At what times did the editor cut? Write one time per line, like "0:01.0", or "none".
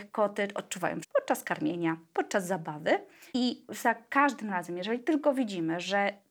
0:01.0
0:03.3